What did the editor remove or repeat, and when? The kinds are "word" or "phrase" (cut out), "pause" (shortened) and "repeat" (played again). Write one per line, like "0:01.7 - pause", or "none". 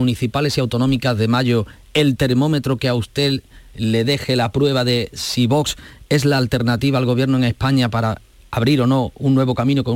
none